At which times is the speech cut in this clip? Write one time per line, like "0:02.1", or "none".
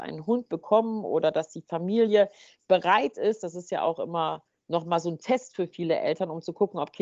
none